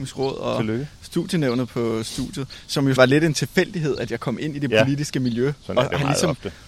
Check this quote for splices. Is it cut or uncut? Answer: cut